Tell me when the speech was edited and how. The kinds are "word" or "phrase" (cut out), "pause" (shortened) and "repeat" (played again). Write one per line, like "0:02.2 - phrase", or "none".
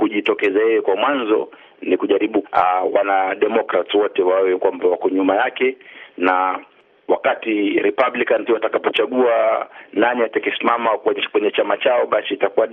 0:02.4 - phrase
0:08.5 - word